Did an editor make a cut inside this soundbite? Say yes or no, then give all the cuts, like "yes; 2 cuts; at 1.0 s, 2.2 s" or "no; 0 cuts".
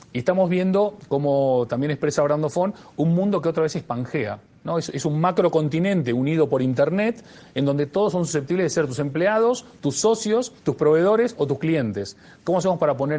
yes; 1 cut; at 10.6 s